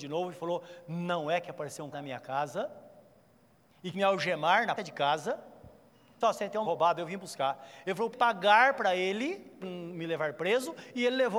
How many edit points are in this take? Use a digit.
7